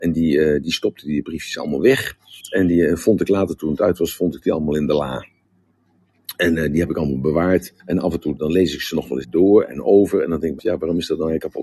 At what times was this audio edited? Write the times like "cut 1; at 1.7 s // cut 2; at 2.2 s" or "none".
cut 1; at 2.4 s // cut 2; at 7.8 s // cut 3; at 8.4 s // cut 4; at 9.2 s // cut 5; at 10.6 s